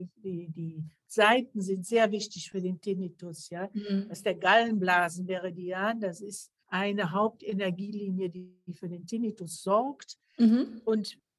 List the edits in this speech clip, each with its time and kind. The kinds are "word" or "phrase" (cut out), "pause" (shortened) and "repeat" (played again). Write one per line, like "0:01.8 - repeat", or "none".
0:06.6 - pause

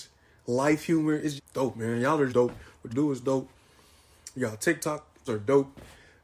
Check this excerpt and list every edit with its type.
0:01.4 - word
0:02.3 - word
0:02.9 - word
0:05.3 - word

